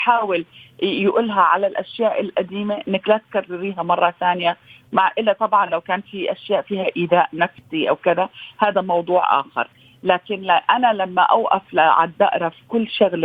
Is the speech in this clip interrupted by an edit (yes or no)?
no